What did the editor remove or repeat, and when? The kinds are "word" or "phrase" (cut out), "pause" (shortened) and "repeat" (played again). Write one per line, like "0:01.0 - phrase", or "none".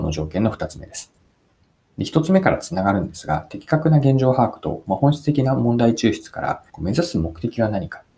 0:06.7 - pause